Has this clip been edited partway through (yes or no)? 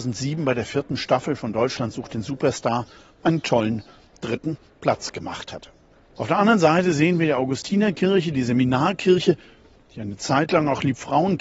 no